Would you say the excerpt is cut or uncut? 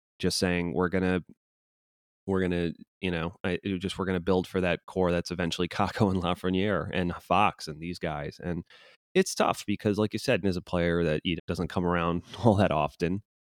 cut